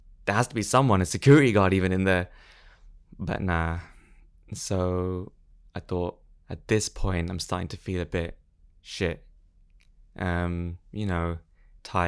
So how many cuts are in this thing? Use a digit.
0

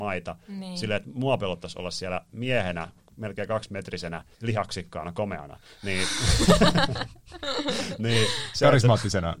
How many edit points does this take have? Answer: 1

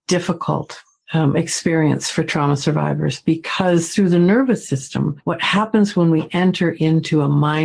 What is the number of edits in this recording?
0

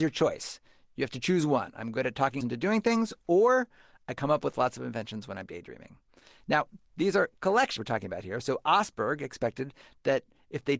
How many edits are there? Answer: 2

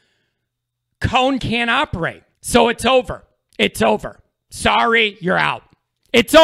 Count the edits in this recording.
2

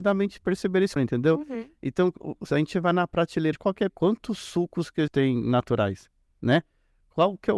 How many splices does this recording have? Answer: 4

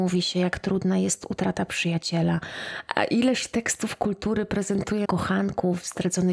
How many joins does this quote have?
1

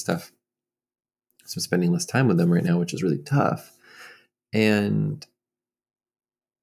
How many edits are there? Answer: 0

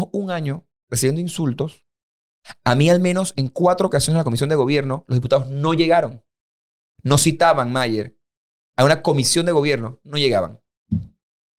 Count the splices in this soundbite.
0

